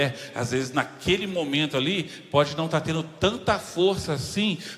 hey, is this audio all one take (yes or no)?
yes